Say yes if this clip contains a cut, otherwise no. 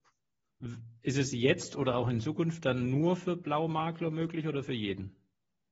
no